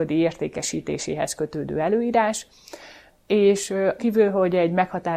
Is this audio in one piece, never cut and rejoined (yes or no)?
no